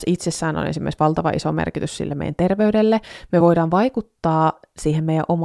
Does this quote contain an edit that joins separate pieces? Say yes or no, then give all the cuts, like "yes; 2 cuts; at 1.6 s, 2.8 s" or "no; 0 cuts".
no; 0 cuts